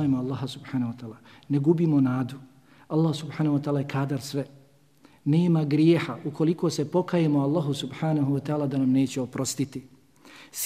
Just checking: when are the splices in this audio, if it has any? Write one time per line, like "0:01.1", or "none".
none